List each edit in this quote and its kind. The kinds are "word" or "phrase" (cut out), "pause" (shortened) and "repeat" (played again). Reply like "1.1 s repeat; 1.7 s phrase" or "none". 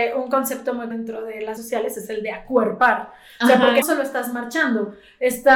0.9 s word; 1.6 s word; 3.8 s word